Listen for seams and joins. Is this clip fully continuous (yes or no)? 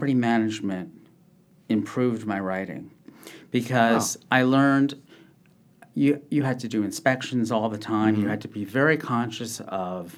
yes